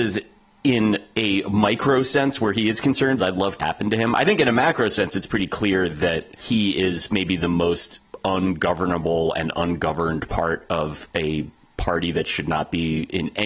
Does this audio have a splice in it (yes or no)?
yes